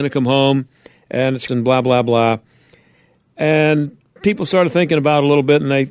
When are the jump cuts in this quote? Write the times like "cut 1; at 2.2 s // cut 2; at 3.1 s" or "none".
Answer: cut 1; at 1.5 s // cut 2; at 4.2 s